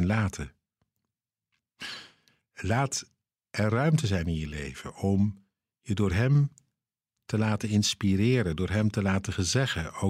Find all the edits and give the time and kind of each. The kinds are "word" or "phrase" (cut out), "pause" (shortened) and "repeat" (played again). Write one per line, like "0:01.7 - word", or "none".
none